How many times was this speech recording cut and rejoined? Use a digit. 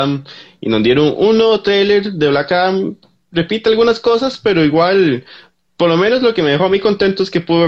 0